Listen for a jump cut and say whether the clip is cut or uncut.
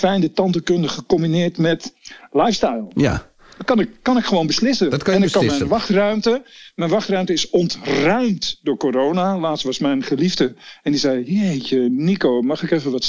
uncut